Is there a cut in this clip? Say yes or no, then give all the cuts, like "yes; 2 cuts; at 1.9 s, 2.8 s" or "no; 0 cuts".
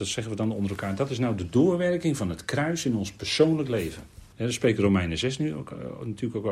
yes; 1 cut; at 4.3 s